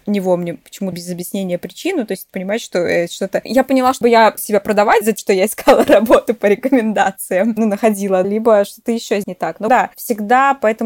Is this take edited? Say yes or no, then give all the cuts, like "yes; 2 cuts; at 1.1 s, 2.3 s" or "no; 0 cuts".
yes; 8 cuts; at 0.9 s, 2.3 s, 4.0 s, 4.4 s, 5.2 s, 8.2 s, 9.2 s, 9.7 s